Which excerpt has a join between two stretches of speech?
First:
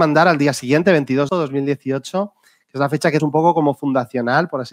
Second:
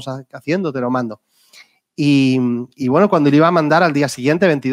first; 2 cuts; at 1.3 s, 3.2 s

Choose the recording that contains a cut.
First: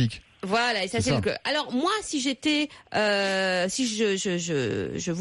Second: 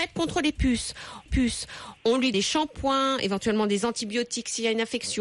second; 2 cuts; at 1.3 s, 2.3 s

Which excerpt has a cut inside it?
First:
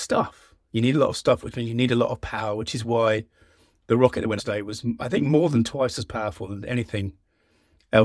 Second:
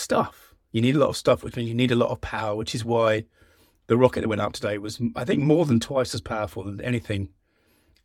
first; 1 cut; at 4.4 s

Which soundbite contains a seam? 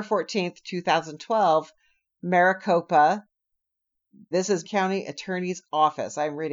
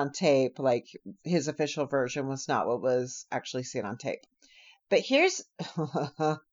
first; 2 cuts; at 4.3 s, 4.6 s

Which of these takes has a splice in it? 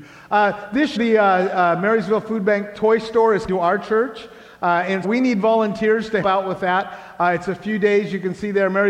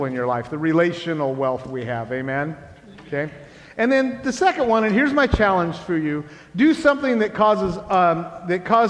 first; 4 cuts; at 1.0 s, 3.5 s, 5.0 s, 6.2 s

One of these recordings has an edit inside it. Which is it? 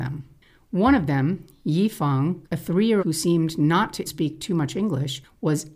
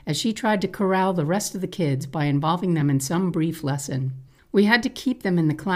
first; 3 cuts; at 2.4 s, 3.0 s, 4.1 s

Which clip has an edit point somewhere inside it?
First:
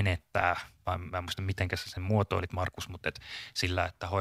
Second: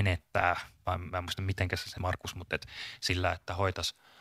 second; 1 cut; at 2.0 s

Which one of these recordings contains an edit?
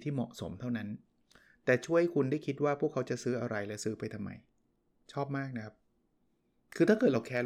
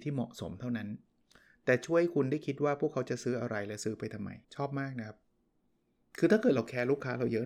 second; 1 cut; at 4.4 s

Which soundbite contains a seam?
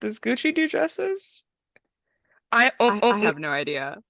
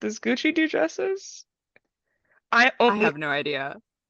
first; 1 cut; at 3.0 s

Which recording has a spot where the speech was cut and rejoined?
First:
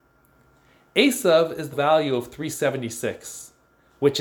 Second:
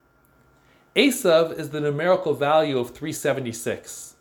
first; 1 cut; at 1.7 s

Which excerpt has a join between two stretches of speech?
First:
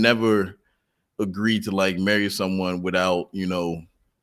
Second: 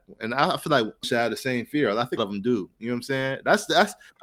second; 2 cuts; at 1.0 s, 2.2 s

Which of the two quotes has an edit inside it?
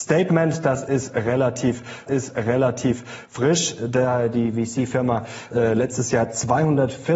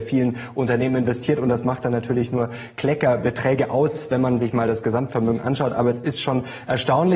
first; 2 cuts; at 2.1 s, 5.5 s

